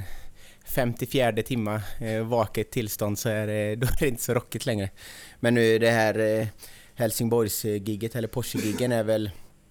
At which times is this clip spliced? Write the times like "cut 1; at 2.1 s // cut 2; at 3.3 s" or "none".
none